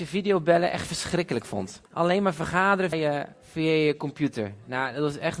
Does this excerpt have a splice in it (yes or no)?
yes